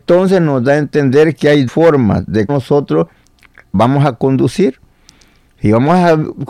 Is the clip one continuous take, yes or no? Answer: no